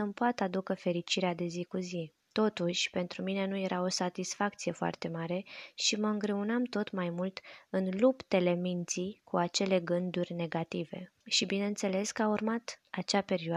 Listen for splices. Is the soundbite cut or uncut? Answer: cut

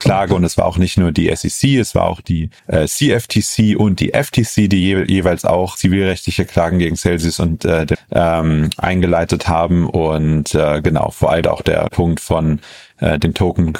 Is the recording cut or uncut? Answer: cut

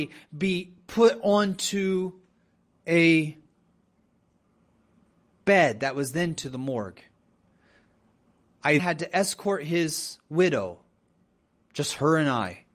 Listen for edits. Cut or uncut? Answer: cut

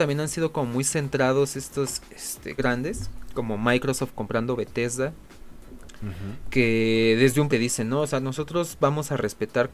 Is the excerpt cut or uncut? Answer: cut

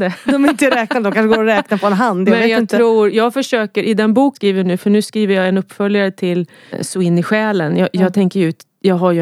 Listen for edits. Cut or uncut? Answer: cut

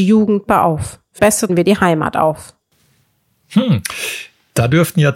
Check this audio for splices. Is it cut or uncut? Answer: cut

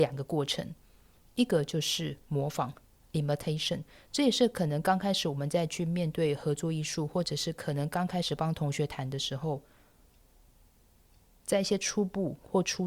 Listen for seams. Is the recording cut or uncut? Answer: uncut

